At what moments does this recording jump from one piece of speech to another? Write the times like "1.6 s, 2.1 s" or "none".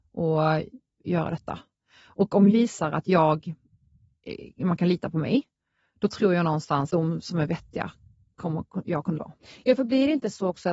2.5 s, 6.9 s, 9.2 s